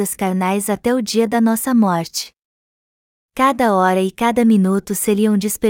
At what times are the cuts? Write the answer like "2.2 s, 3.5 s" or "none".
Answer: none